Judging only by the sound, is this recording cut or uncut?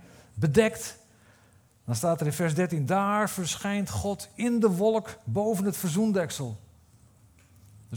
uncut